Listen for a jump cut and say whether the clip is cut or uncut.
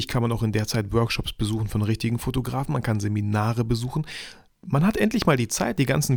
uncut